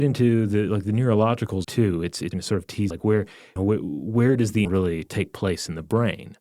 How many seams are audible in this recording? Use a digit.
5